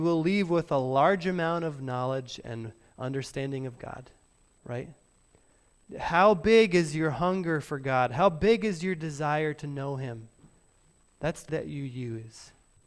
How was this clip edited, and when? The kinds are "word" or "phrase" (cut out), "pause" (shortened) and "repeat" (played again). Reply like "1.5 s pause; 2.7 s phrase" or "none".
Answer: 11.5 s word